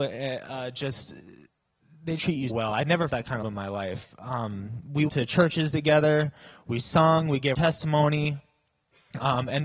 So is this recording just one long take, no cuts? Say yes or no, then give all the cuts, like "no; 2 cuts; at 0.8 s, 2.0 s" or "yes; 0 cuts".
no; 6 cuts; at 2.2 s, 2.5 s, 3.1 s, 3.4 s, 5.1 s, 7.5 s